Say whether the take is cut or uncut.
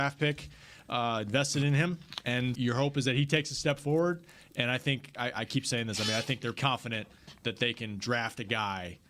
cut